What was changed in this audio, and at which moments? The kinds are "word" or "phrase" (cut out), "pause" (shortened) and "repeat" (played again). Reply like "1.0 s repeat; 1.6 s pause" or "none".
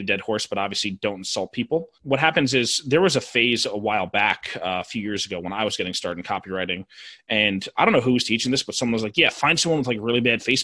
1.9 s pause